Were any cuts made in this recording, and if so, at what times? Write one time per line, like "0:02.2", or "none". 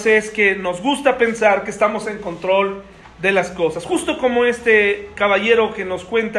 none